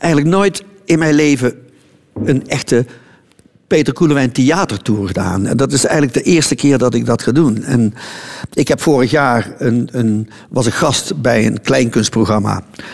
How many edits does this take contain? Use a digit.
0